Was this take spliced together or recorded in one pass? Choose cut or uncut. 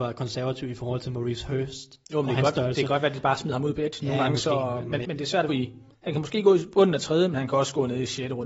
cut